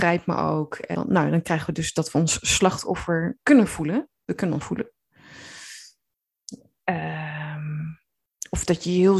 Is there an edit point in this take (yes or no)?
yes